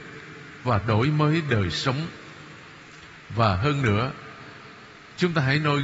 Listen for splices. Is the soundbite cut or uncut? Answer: uncut